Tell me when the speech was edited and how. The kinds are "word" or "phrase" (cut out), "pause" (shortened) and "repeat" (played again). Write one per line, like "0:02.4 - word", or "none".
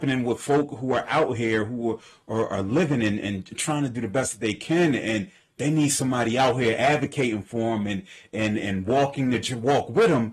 none